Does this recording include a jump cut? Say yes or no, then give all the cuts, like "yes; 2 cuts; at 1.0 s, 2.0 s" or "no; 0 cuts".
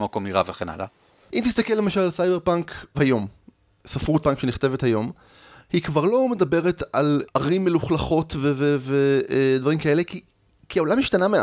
yes; 3 cuts; at 2.9 s, 4.2 s, 7.3 s